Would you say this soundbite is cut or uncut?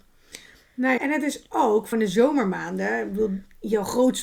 cut